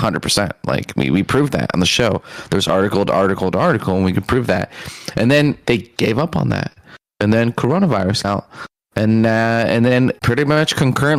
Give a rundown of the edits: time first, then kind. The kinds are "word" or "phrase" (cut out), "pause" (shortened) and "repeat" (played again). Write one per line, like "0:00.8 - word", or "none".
0:06.0 - word
0:08.2 - word
0:10.2 - word